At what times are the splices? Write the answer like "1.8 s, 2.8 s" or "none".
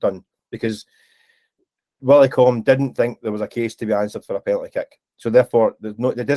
none